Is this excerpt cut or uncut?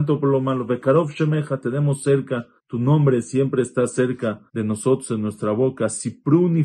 cut